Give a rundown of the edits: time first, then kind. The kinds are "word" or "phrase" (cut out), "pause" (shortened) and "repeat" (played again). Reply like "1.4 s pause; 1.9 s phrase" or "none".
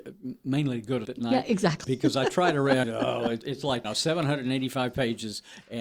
1.0 s word; 1.8 s word; 2.8 s word; 3.4 s word; 3.8 s word